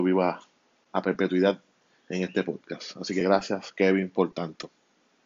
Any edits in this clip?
no; 0 cuts

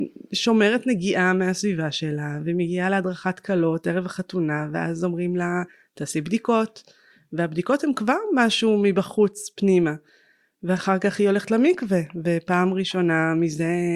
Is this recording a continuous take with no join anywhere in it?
yes; 0 cuts

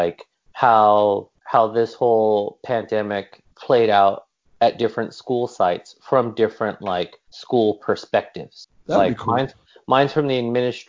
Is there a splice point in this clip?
yes; 1 cut; at 1.4 s

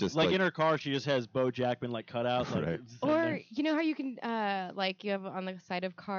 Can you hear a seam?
no; 0 cuts

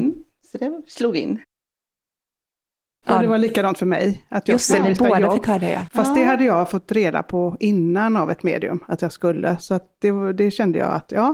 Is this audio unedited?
yes; 0 cuts

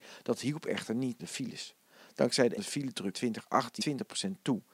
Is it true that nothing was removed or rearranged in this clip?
no; 4 cuts; at 1.2 s, 2.6 s, 3.1 s, 3.8 s

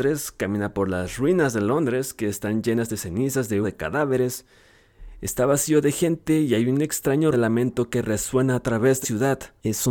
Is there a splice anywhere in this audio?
yes; 3 cuts; at 3.6 s, 7.3 s, 9.0 s

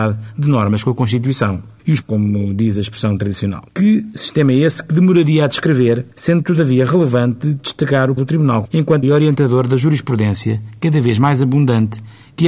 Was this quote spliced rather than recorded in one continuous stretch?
yes; 6 cuts; at 2.0 s, 3.7 s, 6.1 s, 8.2 s, 8.6 s, 9.0 s

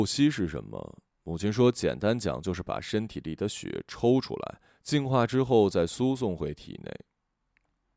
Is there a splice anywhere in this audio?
no; 0 cuts

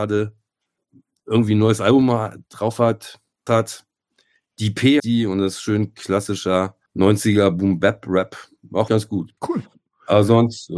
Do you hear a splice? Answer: yes; 5 cuts; at 3.5 s, 5.0 s, 6.9 s, 8.9 s, 9.4 s

